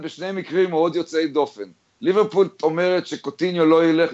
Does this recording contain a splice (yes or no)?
no